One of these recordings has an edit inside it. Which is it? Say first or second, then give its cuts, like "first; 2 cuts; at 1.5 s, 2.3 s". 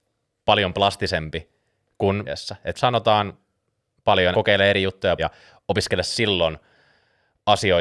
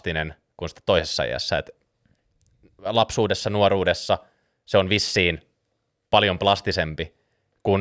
first; 4 cuts; at 2.2 s, 2.7 s, 4.3 s, 5.2 s